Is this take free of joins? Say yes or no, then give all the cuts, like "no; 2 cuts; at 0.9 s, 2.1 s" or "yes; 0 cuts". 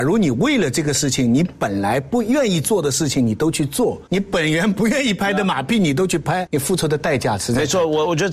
no; 2 cuts; at 4.1 s, 6.5 s